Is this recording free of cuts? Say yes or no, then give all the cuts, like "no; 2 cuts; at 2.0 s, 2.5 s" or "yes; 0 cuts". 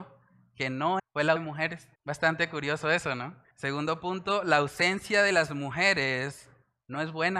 no; 4 cuts; at 1.0 s, 1.4 s, 1.9 s, 3.5 s